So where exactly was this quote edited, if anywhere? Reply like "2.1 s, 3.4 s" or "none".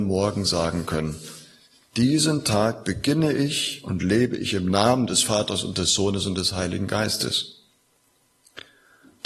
none

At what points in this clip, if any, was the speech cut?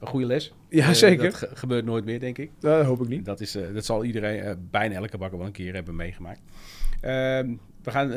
none

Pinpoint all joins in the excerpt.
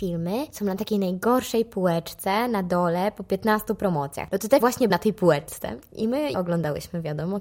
4.6 s, 4.9 s, 6.3 s

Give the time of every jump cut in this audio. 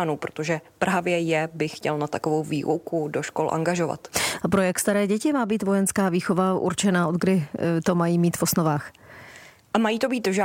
none

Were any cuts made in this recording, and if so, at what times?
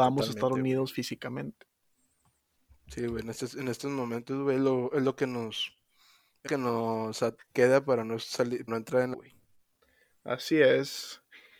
6.5 s, 7.4 s, 8.7 s, 9.1 s

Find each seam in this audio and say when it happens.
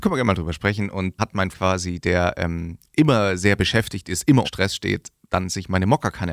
1.2 s, 1.5 s, 4.4 s

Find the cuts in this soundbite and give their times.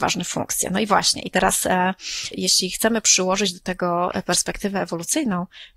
2.3 s

